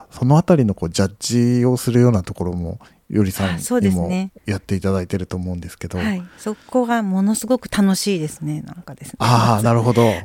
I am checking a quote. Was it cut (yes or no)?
yes